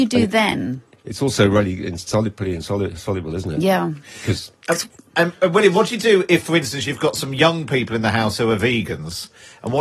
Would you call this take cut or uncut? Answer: cut